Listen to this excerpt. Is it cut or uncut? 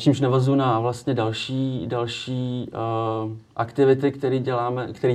uncut